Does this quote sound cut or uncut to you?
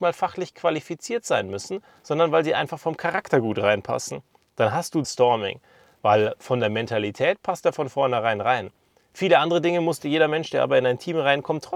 cut